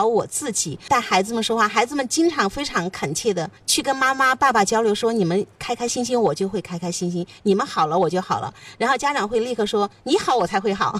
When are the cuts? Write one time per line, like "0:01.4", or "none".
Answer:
0:03.6